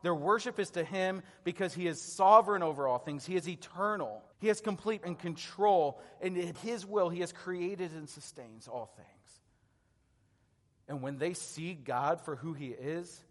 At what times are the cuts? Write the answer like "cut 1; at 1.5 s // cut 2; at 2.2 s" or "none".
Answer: cut 1; at 4.3 s // cut 2; at 5.0 s // cut 3; at 6.5 s